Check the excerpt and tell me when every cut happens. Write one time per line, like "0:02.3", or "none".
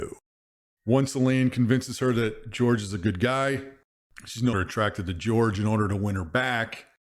0:04.5